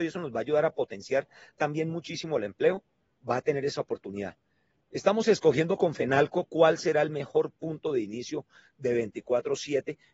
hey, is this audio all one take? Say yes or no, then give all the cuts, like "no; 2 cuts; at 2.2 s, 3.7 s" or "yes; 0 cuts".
yes; 0 cuts